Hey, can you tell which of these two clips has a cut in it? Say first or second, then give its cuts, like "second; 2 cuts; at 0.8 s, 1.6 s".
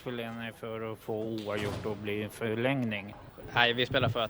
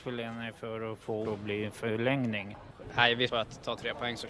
second; 2 cuts; at 1.2 s, 3.3 s